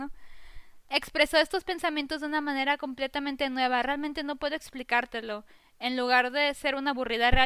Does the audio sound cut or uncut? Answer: uncut